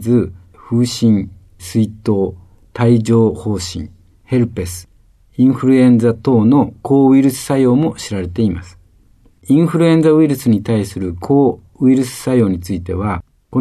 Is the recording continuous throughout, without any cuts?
yes; 0 cuts

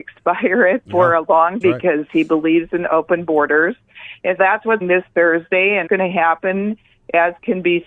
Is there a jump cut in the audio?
yes; 4 cuts; at 1.6 s, 4.4 s, 4.8 s, 5.9 s

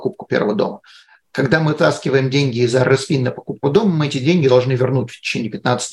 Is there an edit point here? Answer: yes; 1 cut; at 3.6 s

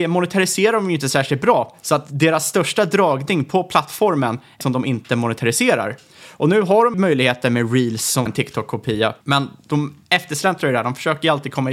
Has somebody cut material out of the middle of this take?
yes; 4 cuts; at 4.6 s, 6.9 s, 8.3 s, 9.2 s

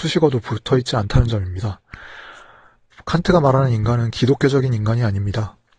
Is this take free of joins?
yes; 0 cuts

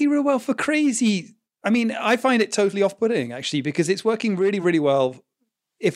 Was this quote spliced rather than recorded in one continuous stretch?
no; 0 cuts

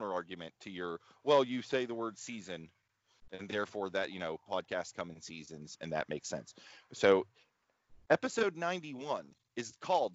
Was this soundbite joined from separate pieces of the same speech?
no; 0 cuts

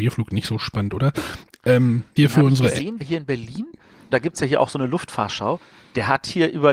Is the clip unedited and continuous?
no; 3 cuts; at 2.2 s, 3.0 s, 4.1 s

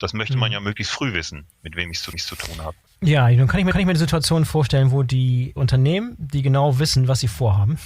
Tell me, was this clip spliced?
yes; 3 cuts; at 1.5 s, 2.1 s, 3.7 s

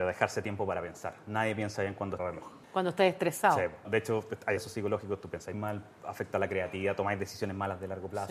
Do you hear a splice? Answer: yes; 5 cuts; at 2.2 s, 2.6 s, 3.8 s, 4.6 s, 5.5 s

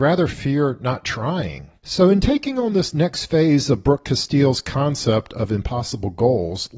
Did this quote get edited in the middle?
yes; 1 cut; at 1.8 s

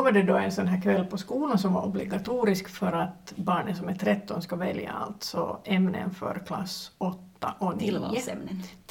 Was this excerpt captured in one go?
yes; 0 cuts

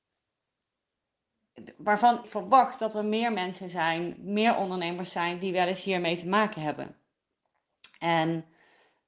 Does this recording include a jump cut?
yes; 1 cut; at 2.2 s

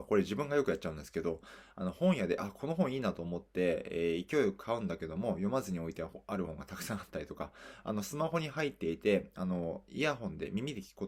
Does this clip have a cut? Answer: no; 0 cuts

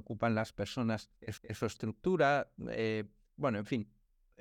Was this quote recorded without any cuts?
no; 1 cut; at 1.4 s

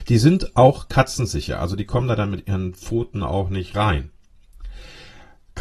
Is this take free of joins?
yes; 0 cuts

